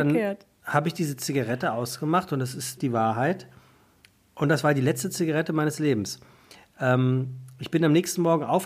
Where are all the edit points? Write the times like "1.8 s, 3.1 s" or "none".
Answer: 2.8 s